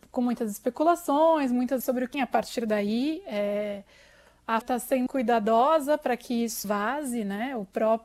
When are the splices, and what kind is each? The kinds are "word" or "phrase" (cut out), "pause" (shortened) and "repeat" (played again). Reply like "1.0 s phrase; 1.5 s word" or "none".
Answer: 1.8 s word; 2.1 s word; 4.6 s word; 5.1 s word; 6.6 s word